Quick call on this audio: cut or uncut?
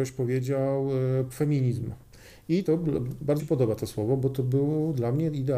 cut